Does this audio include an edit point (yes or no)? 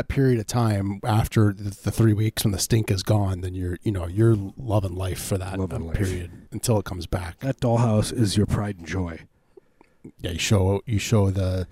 yes